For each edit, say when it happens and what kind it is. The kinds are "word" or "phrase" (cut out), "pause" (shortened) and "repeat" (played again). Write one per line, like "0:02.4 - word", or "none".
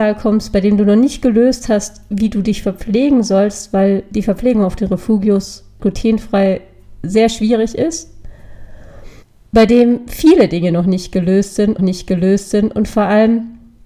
0:05.8 - word
0:09.2 - pause
0:11.8 - repeat